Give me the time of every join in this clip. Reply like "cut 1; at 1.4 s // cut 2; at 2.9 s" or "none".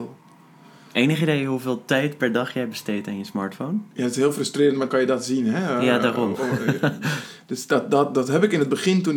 cut 1; at 3.9 s // cut 2; at 4.9 s